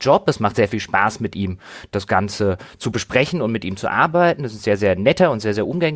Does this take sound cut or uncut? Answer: uncut